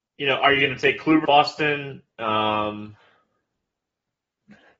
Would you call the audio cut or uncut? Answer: cut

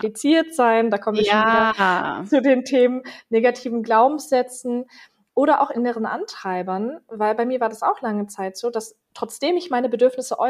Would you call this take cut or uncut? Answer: uncut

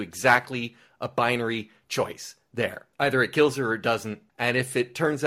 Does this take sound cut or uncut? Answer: cut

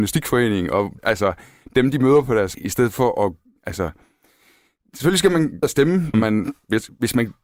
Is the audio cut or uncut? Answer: cut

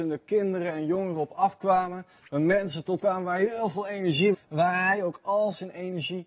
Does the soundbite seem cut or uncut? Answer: cut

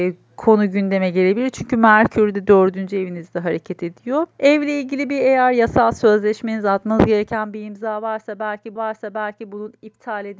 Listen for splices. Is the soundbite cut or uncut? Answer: cut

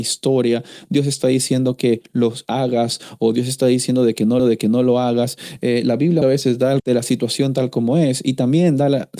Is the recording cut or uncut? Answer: cut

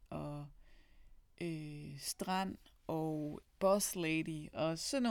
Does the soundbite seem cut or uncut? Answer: cut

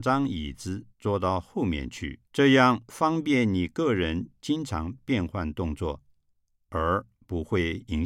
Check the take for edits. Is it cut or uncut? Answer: cut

